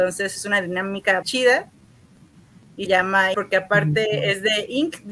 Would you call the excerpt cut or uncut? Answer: cut